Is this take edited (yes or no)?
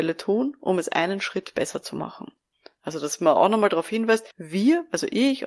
yes